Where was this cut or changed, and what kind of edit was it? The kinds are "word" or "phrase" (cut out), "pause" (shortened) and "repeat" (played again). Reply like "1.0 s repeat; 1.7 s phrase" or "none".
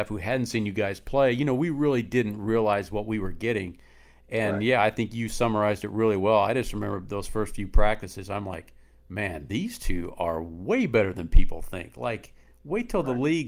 none